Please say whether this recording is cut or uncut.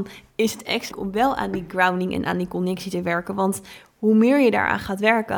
cut